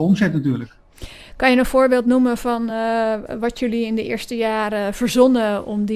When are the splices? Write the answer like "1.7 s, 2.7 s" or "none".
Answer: none